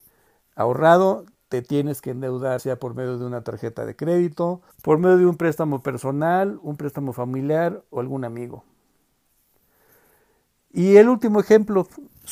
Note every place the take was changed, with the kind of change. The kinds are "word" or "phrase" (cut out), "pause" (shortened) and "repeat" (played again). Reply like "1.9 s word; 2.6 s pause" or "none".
2.6 s word; 4.7 s pause